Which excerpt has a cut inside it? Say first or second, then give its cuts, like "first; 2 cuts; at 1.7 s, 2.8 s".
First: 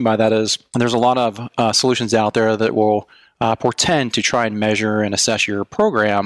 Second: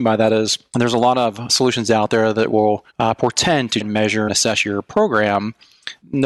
second; 4 cuts; at 1.5 s, 2.9 s, 3.8 s, 4.3 s